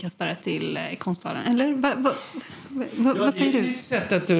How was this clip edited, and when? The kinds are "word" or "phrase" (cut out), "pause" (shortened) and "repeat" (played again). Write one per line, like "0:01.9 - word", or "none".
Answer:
none